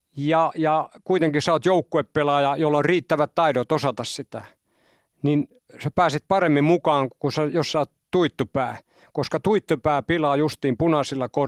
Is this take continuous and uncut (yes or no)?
yes